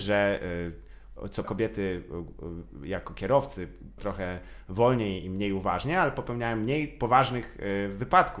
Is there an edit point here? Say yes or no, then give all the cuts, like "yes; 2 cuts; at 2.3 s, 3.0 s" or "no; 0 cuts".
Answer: yes; 2 cuts; at 1.4 s, 4.0 s